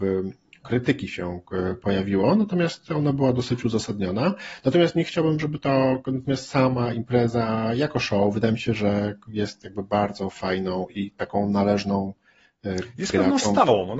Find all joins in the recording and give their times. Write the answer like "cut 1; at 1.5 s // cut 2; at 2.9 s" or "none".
none